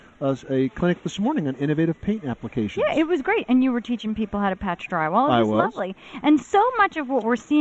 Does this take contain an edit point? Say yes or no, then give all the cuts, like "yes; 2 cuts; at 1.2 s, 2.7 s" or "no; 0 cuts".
no; 0 cuts